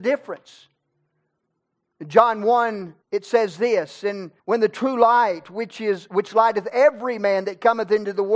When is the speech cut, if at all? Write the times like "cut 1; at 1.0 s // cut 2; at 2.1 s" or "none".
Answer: cut 1; at 3.0 s // cut 2; at 4.4 s

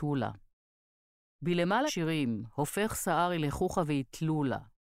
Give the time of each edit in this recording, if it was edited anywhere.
cut 1; at 1.9 s

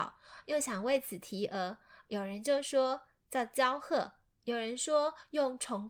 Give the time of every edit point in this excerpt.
none

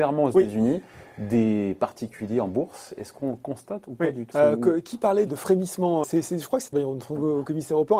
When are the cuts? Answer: cut 1; at 4.3 s // cut 2; at 5.3 s // cut 3; at 6.0 s // cut 4; at 6.7 s

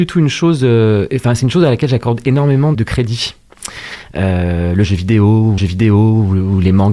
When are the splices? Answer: cut 1; at 2.7 s // cut 2; at 5.6 s

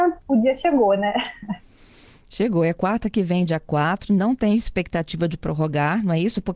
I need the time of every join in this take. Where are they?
none

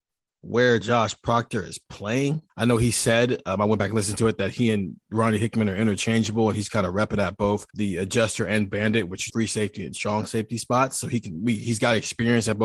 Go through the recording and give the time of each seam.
cut 1; at 2.5 s // cut 2; at 7.7 s // cut 3; at 9.3 s

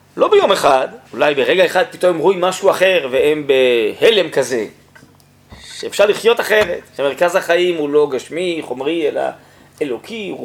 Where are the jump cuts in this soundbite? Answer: cut 1; at 1.0 s

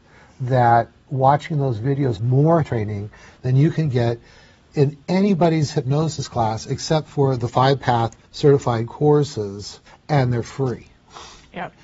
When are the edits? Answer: cut 1; at 2.2 s // cut 2; at 2.6 s // cut 3; at 8.2 s // cut 4; at 9.9 s

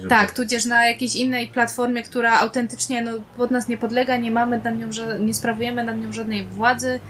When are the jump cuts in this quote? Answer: none

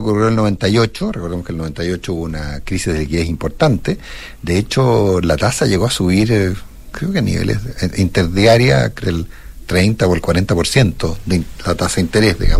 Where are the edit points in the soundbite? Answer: cut 1; at 9.0 s

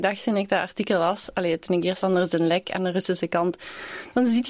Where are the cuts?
cut 1; at 2.0 s

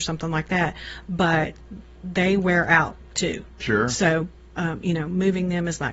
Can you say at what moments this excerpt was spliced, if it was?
cut 1; at 3.0 s

